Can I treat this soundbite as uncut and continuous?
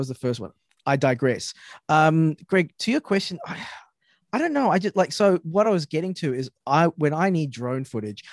yes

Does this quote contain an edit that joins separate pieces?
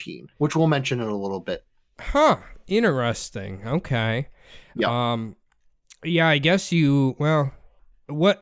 no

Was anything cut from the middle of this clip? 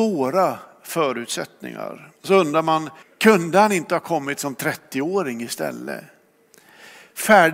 yes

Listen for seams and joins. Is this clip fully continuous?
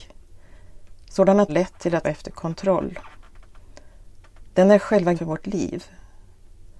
no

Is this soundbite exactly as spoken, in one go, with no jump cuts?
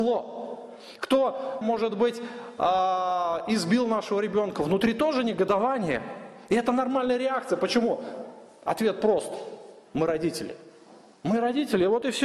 no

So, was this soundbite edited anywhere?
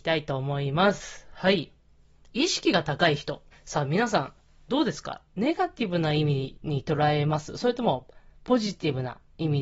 yes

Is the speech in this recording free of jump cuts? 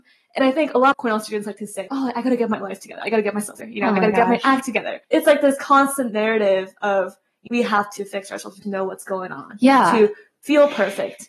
no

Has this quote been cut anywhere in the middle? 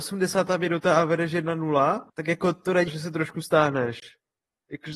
yes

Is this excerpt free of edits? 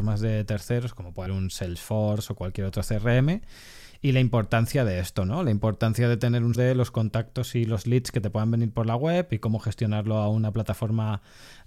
no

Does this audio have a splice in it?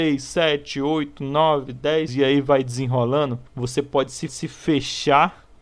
yes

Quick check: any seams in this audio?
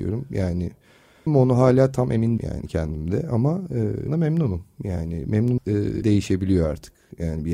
yes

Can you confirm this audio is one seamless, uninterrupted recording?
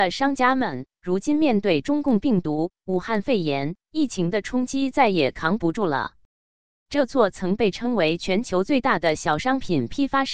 yes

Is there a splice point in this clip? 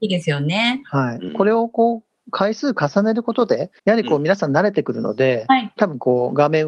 yes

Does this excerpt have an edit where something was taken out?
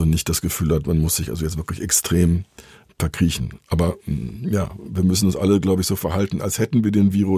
no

